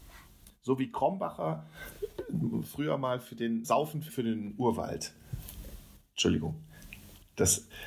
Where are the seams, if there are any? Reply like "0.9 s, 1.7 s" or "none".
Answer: 3.6 s, 4.1 s